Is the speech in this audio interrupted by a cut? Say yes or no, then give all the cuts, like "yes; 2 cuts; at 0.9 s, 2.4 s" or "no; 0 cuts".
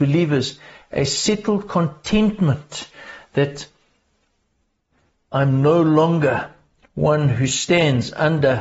no; 0 cuts